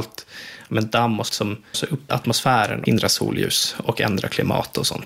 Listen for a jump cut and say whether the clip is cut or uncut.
cut